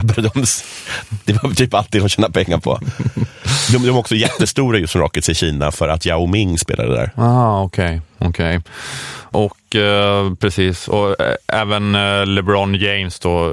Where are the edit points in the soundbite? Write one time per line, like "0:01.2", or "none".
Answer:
none

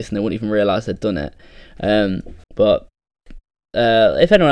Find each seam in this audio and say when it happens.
0:02.4

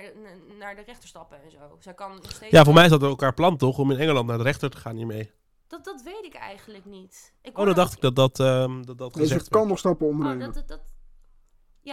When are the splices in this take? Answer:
0:07.4

